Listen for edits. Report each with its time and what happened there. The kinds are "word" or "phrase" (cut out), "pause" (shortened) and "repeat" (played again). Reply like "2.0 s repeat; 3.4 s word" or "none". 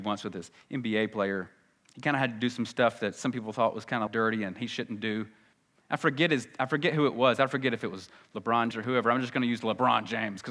1.8 s pause; 4.1 s word; 5.5 s pause; 8.7 s word